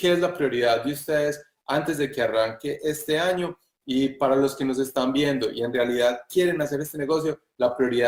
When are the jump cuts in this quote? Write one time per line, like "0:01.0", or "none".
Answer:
none